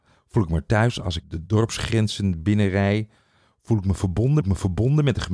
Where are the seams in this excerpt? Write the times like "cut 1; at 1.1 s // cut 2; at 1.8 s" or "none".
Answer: cut 1; at 4.4 s